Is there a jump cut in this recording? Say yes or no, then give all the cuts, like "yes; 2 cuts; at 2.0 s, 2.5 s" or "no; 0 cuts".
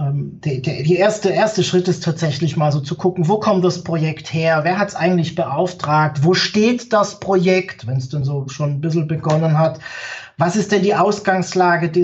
no; 0 cuts